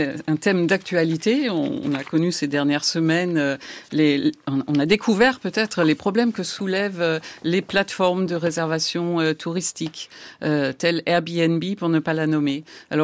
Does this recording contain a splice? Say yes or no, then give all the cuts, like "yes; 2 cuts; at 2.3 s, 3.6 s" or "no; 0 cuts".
yes; 1 cut; at 3.9 s